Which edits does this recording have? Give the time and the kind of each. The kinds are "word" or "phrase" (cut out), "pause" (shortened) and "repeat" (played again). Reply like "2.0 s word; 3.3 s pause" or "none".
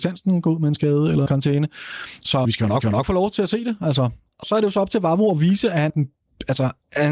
1.3 s word; 2.4 s word; 2.8 s repeat; 4.4 s word; 5.9 s word